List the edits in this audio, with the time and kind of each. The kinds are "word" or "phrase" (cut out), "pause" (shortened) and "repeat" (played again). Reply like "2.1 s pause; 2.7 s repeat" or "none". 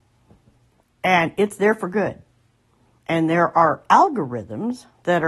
none